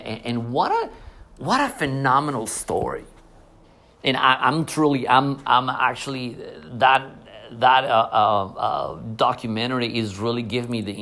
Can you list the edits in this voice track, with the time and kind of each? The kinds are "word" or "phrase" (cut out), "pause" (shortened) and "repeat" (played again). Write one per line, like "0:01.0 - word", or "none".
0:03.6 - pause